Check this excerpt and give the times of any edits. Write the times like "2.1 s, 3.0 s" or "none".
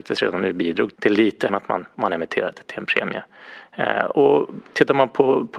0.9 s, 1.5 s